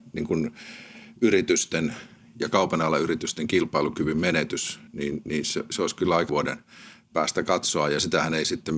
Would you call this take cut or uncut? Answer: cut